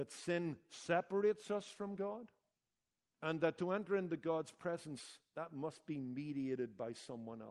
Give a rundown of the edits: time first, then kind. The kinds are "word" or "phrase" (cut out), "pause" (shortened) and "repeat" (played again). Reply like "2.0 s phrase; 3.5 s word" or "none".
none